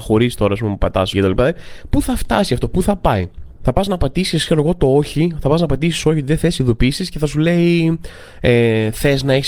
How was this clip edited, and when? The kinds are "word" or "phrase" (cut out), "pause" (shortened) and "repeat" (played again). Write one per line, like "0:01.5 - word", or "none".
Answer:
0:01.1 - word